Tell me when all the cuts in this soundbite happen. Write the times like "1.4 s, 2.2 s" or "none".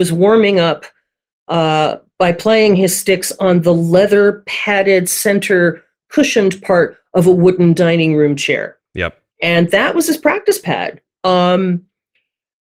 9.3 s